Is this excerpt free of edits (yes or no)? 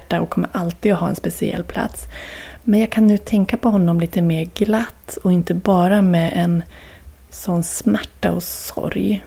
yes